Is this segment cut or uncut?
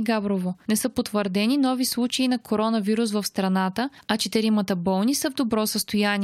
uncut